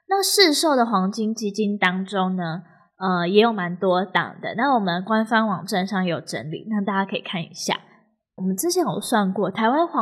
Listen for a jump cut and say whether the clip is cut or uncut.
uncut